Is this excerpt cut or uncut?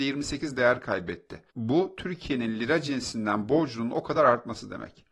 cut